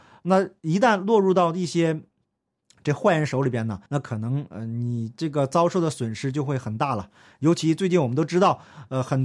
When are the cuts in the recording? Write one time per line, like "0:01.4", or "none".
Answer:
0:03.9